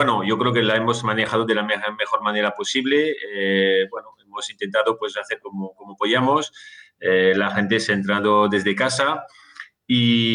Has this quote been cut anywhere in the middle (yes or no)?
no